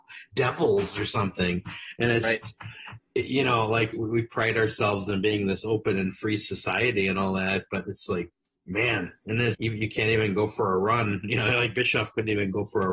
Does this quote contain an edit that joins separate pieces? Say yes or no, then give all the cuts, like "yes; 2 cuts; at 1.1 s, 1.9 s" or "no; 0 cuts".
yes; 3 cuts; at 2.2 s, 3.9 s, 9.5 s